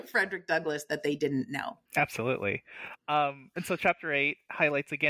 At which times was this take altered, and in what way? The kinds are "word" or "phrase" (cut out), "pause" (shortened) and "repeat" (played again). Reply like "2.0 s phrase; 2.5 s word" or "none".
1.9 s pause

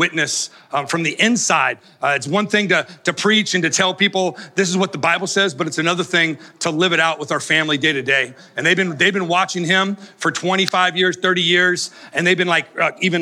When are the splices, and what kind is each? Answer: none

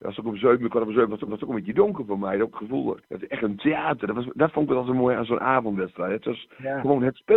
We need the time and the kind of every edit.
1.3 s repeat; 3.0 s pause

